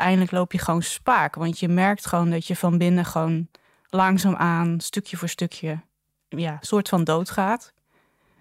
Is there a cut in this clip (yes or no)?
no